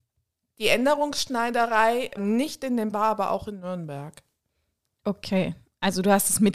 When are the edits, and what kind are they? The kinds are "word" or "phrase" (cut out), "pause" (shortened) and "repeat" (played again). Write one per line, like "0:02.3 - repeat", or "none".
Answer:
0:02.2 - word
0:02.9 - word